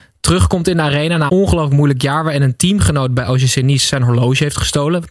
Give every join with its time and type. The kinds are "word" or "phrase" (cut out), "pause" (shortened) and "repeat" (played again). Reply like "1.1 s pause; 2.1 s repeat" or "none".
1.3 s word